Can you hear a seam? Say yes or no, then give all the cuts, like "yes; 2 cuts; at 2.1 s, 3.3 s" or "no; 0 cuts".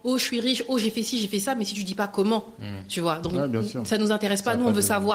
no; 0 cuts